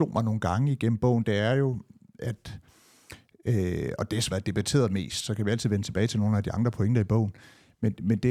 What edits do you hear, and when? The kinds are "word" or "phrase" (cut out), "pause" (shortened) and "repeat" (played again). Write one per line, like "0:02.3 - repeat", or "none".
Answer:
0:04.3 - word